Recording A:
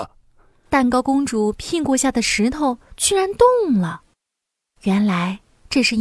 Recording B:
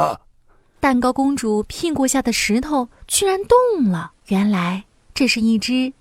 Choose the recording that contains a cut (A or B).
B